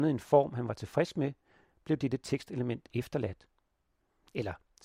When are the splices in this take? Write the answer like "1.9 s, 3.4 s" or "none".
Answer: none